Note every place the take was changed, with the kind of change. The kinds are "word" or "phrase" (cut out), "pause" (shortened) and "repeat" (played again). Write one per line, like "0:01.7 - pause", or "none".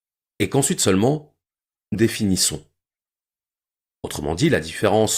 0:01.9 - word